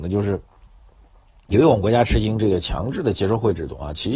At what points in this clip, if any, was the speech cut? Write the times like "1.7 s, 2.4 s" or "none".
none